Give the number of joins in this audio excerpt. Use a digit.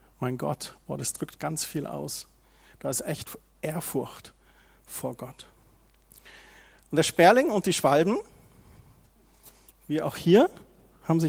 0